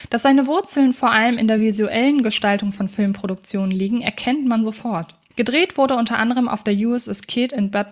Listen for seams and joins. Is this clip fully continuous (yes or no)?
yes